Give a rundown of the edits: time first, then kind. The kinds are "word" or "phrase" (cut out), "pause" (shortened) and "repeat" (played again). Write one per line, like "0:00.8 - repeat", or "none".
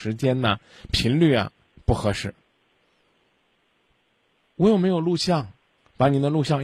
none